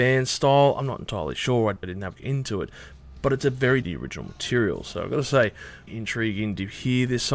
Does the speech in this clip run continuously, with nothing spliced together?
no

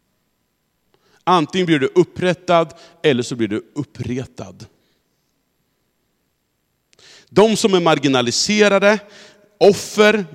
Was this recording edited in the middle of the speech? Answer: no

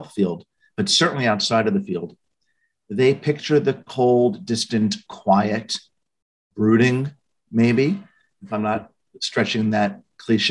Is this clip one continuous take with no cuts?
yes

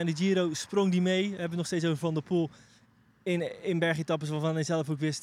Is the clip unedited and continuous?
yes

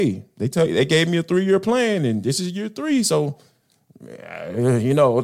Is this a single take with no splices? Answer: yes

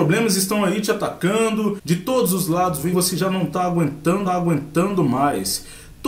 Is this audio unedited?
no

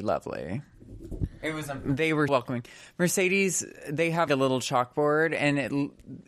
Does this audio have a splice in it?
yes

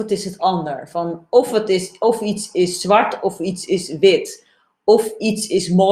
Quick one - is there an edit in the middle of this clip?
no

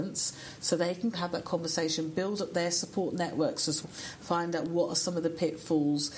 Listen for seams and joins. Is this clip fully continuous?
no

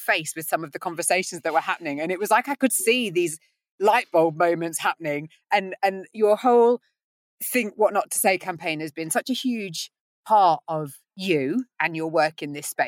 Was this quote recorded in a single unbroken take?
yes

